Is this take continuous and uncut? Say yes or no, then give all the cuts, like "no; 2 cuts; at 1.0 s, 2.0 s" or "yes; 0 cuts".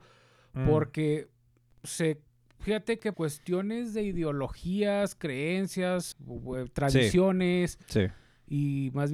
no; 2 cuts; at 3.1 s, 6.1 s